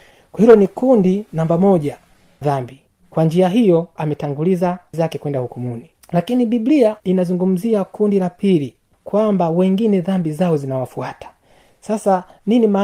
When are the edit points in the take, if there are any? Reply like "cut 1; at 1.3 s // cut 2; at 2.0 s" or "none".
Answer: cut 1; at 2.4 s // cut 2; at 2.9 s // cut 3; at 4.0 s // cut 4; at 4.9 s // cut 5; at 6.0 s // cut 6; at 7.0 s // cut 7; at 8.9 s